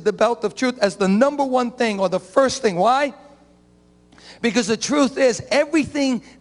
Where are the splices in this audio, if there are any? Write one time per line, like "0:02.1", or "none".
none